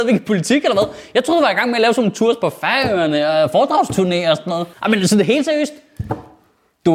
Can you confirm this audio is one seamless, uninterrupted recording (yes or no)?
no